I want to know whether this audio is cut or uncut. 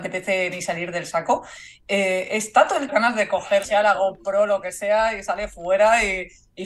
cut